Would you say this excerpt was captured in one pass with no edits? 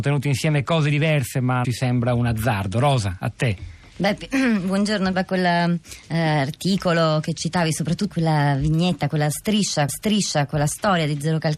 no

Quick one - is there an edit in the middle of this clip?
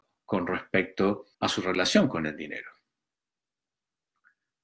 yes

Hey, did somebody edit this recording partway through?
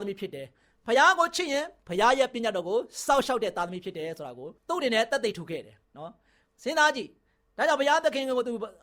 yes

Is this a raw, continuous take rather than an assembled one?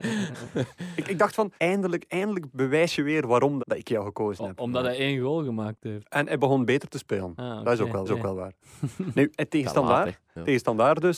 no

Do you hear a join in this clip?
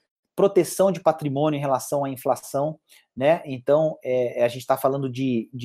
no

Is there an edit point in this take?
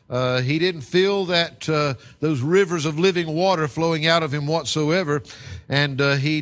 no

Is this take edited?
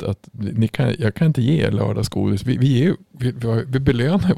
no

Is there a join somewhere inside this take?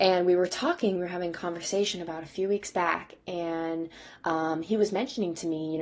no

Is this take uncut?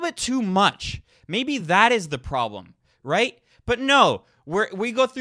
yes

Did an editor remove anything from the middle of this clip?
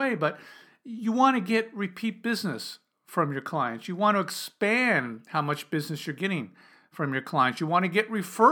no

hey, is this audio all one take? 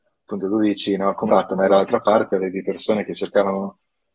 no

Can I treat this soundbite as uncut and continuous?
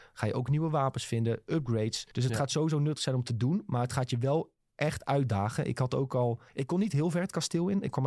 no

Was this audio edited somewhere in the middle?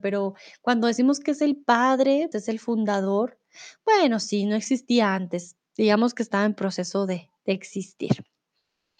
yes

